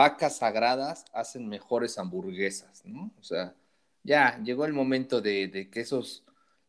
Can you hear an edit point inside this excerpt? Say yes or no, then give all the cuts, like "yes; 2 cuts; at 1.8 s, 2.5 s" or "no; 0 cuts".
no; 0 cuts